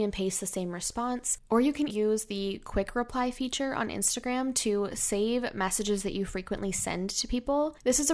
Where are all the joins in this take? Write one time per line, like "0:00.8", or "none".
0:01.9